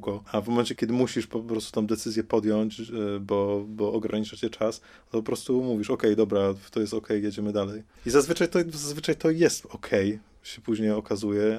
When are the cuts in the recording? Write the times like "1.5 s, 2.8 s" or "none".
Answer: 7.9 s